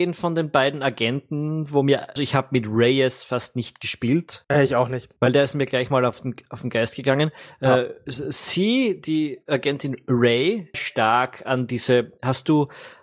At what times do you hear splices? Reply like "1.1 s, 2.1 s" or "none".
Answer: 2.2 s, 10.7 s